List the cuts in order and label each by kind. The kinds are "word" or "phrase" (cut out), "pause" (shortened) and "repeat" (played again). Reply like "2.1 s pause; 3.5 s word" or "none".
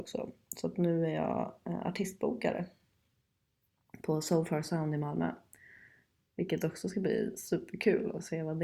none